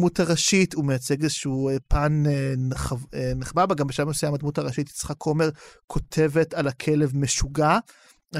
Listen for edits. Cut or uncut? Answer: uncut